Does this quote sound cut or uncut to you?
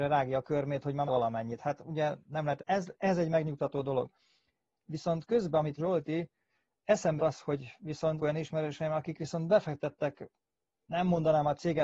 cut